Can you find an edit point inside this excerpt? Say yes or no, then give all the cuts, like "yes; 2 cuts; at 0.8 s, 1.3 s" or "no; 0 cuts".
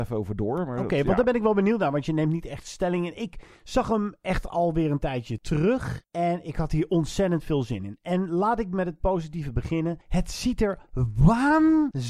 yes; 2 cuts; at 3.6 s, 10.0 s